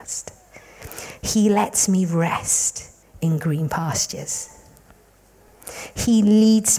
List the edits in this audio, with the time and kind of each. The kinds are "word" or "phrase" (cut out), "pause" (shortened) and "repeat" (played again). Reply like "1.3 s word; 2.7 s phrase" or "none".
3.0 s pause